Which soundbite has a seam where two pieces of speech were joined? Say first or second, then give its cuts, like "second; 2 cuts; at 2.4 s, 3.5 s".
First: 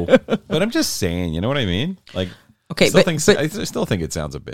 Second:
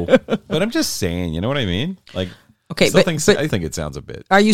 second; 1 cut; at 3.5 s